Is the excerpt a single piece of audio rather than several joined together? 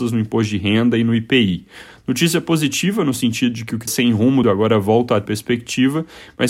no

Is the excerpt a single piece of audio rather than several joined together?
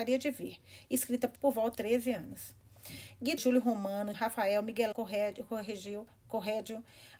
no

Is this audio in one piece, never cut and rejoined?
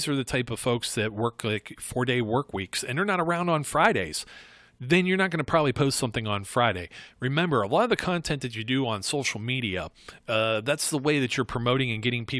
yes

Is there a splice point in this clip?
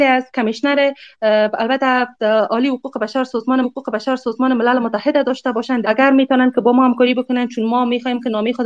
yes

